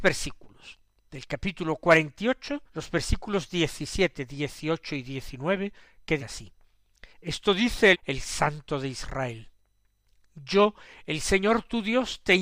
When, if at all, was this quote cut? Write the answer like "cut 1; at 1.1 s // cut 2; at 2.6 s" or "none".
cut 1; at 2.7 s // cut 2; at 6.2 s // cut 3; at 7.1 s // cut 4; at 7.9 s